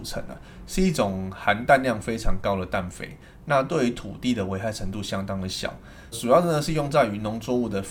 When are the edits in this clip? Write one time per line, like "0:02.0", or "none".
0:06.1

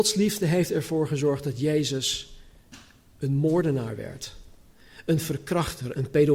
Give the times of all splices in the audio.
none

